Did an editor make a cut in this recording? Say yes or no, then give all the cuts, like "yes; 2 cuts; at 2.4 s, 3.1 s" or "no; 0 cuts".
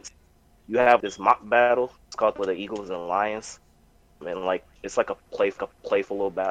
yes; 6 cuts; at 1.0 s, 2.0 s, 2.4 s, 4.2 s, 4.8 s, 5.6 s